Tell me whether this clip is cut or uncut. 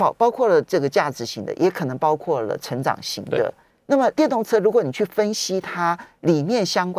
cut